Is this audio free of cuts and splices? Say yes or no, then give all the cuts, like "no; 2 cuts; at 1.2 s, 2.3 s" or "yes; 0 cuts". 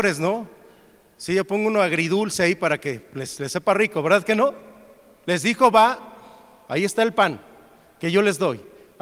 yes; 0 cuts